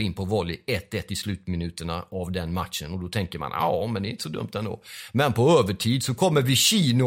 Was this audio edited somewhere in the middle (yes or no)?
no